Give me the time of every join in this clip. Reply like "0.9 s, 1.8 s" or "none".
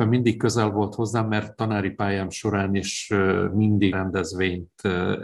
3.9 s

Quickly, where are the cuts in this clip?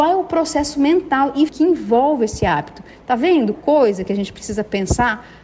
1.5 s, 3.5 s

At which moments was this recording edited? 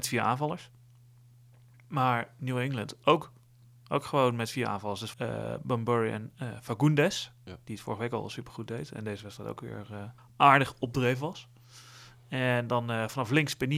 5.1 s, 10.2 s

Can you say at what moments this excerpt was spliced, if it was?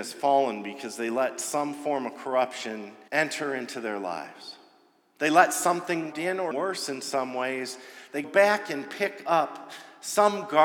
3.1 s, 6.1 s, 6.5 s, 8.2 s

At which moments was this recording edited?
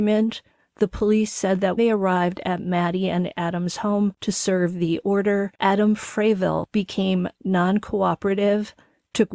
1.8 s

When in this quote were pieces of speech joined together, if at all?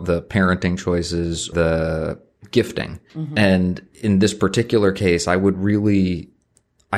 1.5 s, 3.1 s

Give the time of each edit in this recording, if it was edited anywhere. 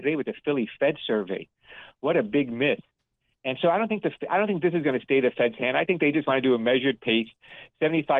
none

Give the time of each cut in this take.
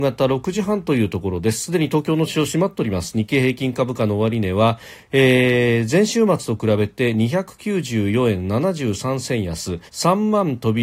9.9 s

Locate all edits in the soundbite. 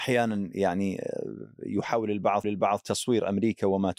2.4 s

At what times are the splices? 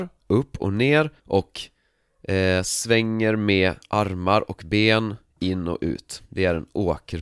1.2 s

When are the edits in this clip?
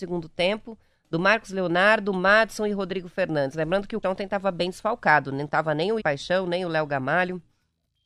4.0 s, 6.0 s

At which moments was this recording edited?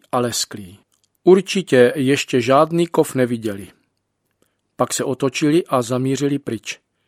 none

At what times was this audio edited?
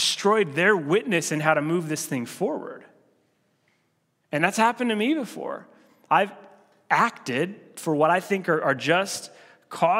none

